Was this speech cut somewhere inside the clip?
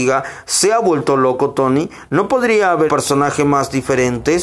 yes; 1 cut; at 2.9 s

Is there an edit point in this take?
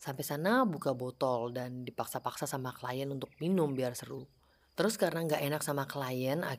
no; 0 cuts

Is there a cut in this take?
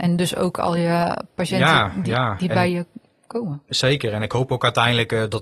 no; 0 cuts

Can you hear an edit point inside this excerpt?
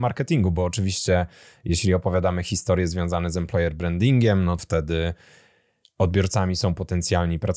yes; 1 cut; at 4.6 s

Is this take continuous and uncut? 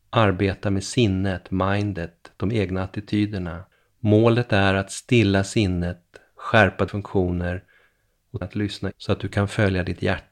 no; 4 cuts; at 3.7 s, 6.9 s, 8.4 s, 8.9 s

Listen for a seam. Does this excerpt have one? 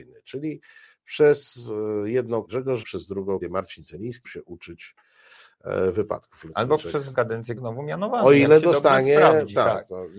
yes; 6 cuts; at 2.5 s, 2.8 s, 3.4 s, 4.2 s, 7.1 s, 7.6 s

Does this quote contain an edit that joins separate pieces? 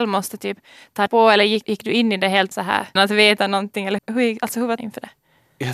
yes; 6 cuts; at 1.1 s, 1.6 s, 2.5 s, 3.0 s, 4.0 s, 4.8 s

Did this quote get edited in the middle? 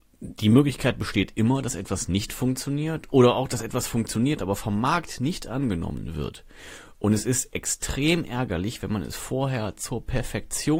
no; 0 cuts

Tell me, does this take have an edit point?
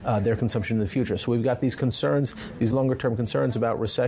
no; 0 cuts

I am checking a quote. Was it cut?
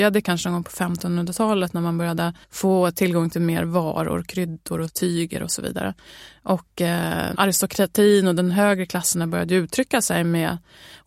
yes; 1 cut; at 2.4 s

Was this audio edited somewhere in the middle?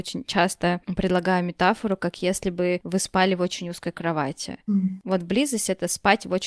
no; 0 cuts

